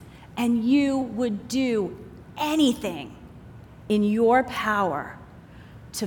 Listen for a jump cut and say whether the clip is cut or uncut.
uncut